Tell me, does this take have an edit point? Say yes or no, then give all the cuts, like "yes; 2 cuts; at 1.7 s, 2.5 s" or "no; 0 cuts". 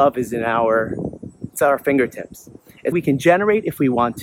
yes; 2 cuts; at 1.5 s, 2.9 s